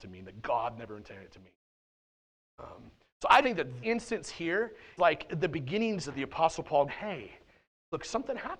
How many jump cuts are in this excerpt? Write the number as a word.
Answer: five